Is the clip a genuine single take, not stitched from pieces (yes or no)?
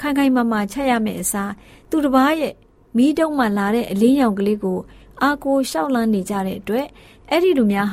yes